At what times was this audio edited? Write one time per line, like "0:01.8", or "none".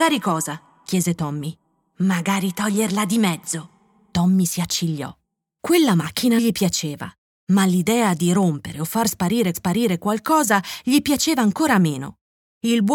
0:06.4
0:09.5